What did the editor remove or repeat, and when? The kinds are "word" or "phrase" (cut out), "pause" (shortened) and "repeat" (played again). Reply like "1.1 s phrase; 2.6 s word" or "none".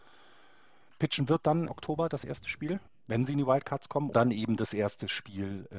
1.7 s word; 2.9 s pause; 4.1 s word